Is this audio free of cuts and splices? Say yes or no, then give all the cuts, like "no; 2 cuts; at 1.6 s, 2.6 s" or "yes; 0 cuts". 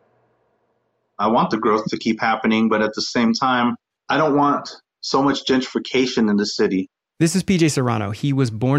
yes; 0 cuts